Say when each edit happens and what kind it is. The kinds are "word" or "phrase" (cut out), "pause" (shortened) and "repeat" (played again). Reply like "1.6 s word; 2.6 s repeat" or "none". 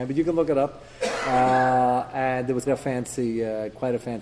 2.7 s word